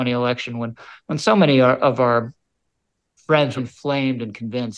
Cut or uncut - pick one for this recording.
cut